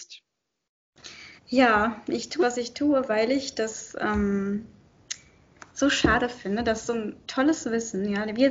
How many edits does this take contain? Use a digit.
2